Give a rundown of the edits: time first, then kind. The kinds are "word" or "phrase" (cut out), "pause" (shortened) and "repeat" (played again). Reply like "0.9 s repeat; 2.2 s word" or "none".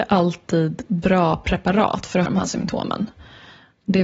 2.3 s word